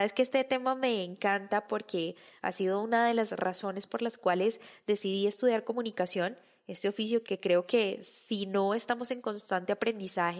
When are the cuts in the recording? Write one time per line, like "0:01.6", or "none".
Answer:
0:07.2